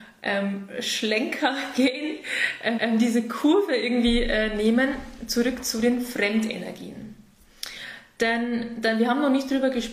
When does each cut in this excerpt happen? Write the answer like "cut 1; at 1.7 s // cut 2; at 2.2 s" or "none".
cut 1; at 2.7 s